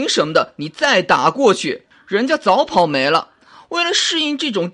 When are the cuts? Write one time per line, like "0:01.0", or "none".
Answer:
none